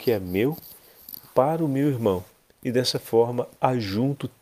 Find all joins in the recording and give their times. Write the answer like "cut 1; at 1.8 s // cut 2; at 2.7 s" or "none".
none